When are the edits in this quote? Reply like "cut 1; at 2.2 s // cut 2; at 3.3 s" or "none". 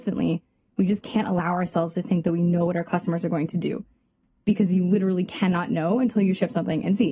none